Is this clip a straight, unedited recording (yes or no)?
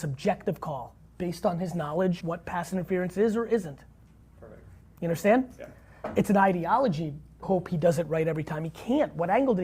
no